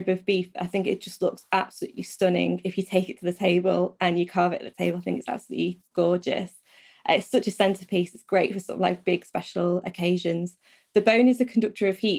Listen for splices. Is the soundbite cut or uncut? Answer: uncut